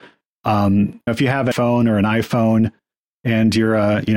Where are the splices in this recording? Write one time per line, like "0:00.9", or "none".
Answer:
0:01.1
0:01.5